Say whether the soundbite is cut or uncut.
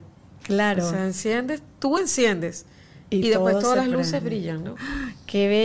uncut